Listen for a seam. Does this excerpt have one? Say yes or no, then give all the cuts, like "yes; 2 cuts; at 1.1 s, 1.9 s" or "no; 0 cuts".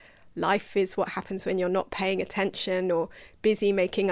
no; 0 cuts